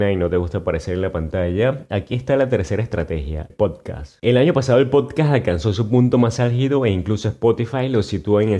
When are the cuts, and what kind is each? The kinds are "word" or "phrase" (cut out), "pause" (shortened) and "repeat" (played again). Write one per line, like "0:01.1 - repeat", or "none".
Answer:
0:03.5 - word